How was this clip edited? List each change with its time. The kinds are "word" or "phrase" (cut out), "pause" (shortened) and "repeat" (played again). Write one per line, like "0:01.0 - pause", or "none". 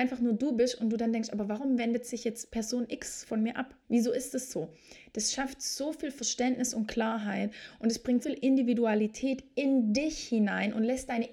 0:03.8 - pause
0:08.2 - word